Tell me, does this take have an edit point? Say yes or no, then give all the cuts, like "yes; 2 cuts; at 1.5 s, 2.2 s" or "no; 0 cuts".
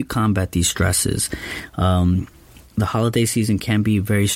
no; 0 cuts